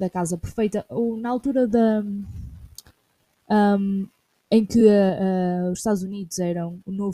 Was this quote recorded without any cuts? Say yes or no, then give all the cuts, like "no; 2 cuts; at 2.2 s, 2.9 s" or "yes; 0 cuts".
yes; 0 cuts